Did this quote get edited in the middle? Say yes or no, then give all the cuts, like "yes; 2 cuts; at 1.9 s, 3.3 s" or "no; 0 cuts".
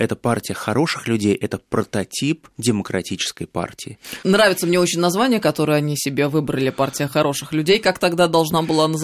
yes; 1 cut; at 2.5 s